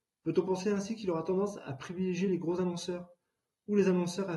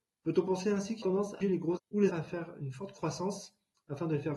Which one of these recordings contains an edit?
second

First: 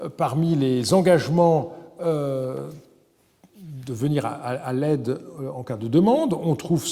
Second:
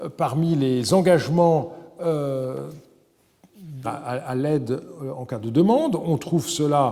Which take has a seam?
second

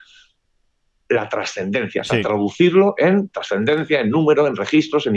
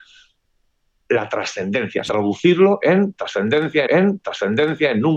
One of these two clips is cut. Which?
second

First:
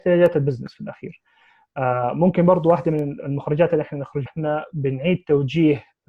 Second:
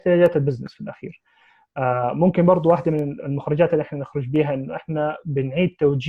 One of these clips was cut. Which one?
first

